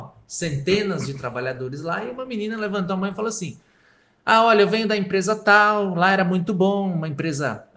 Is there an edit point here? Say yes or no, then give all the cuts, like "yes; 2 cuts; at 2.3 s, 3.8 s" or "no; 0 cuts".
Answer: no; 0 cuts